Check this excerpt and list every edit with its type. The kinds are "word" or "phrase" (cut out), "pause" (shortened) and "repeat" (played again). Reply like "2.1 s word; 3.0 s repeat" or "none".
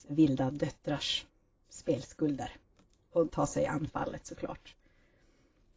3.3 s word